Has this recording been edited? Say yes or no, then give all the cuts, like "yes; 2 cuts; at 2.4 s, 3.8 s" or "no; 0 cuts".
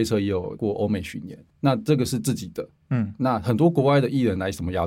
yes; 2 cuts; at 1.5 s, 2.8 s